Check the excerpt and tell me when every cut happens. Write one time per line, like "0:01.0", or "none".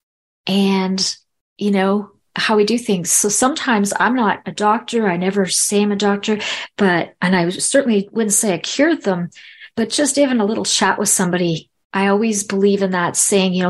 none